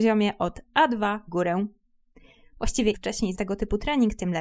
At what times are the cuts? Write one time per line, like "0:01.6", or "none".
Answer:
0:01.3
0:02.9
0:03.3